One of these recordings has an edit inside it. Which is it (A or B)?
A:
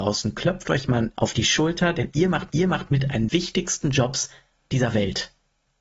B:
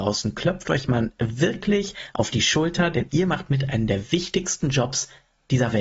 A